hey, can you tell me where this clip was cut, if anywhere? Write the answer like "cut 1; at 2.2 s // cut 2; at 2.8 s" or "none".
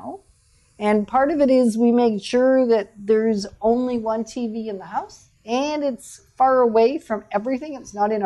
cut 1; at 5.4 s

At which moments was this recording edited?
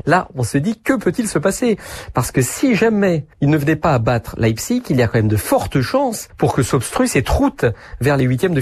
cut 1; at 3.3 s

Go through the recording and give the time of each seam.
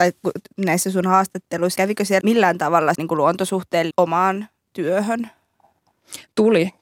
cut 1; at 1.8 s // cut 2; at 2.2 s // cut 3; at 2.9 s // cut 4; at 3.9 s

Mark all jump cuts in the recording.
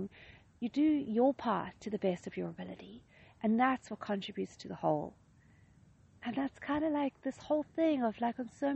none

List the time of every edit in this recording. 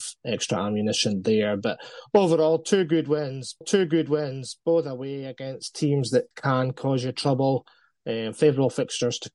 cut 1; at 3.6 s // cut 2; at 6.3 s

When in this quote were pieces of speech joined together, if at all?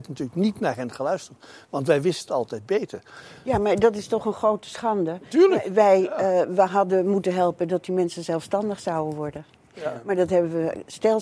cut 1; at 2.3 s

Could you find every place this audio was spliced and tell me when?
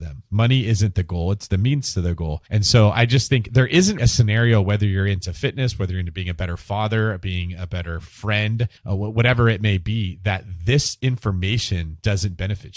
cut 1; at 2.5 s // cut 2; at 4.0 s // cut 3; at 8.8 s

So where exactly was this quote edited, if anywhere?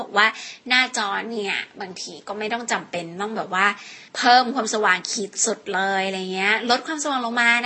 cut 1; at 4.1 s

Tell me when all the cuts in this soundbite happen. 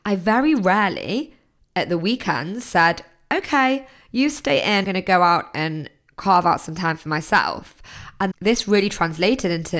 cut 1; at 4.8 s // cut 2; at 8.3 s

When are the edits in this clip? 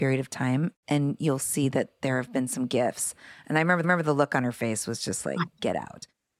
cut 1; at 3.8 s

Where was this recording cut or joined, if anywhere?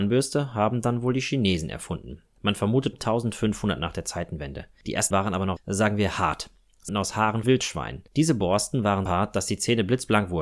cut 1; at 2.9 s // cut 2; at 5.1 s // cut 3; at 5.6 s // cut 4; at 6.9 s // cut 5; at 7.4 s // cut 6; at 9.1 s

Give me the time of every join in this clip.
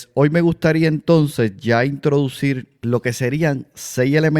cut 1; at 2.7 s

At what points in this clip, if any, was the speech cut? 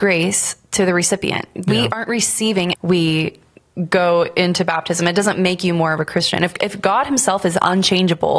cut 1; at 2.7 s

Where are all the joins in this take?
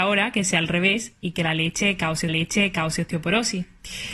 cut 1; at 2.3 s

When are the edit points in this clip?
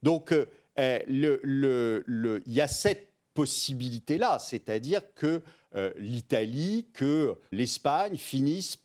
cut 1; at 7.5 s

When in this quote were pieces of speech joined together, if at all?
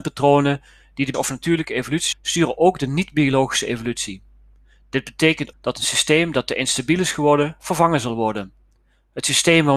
cut 1; at 1.1 s // cut 2; at 2.1 s // cut 3; at 5.5 s

